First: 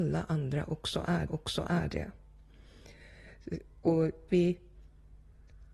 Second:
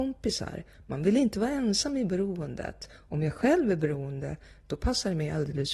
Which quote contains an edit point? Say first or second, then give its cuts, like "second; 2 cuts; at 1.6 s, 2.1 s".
first; 2 cuts; at 1.3 s, 4.3 s